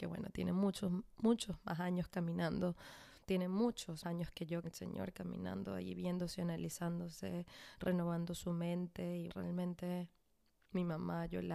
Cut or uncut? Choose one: cut